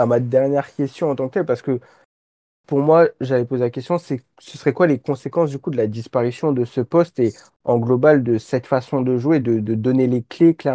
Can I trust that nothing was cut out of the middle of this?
yes; 0 cuts

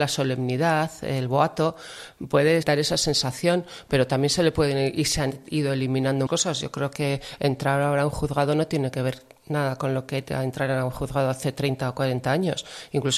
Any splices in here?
yes; 2 cuts; at 2.6 s, 6.3 s

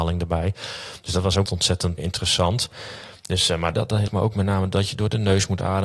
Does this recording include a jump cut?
yes; 4 cuts; at 1.5 s, 2.0 s, 3.7 s, 4.1 s

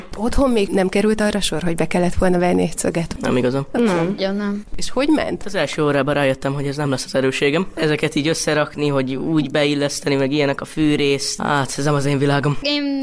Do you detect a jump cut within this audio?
no; 0 cuts

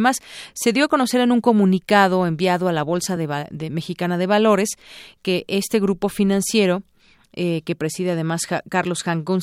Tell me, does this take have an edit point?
no; 0 cuts

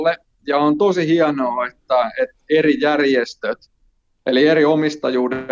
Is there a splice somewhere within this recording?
no; 0 cuts

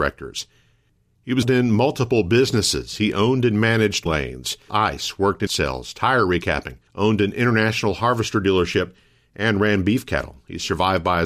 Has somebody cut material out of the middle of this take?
yes; 5 cuts; at 1.4 s, 4.1 s, 4.7 s, 5.5 s, 6.9 s

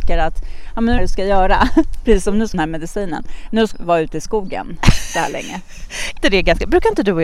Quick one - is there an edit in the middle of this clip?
yes; 4 cuts; at 1.0 s, 2.5 s, 3.7 s, 6.2 s

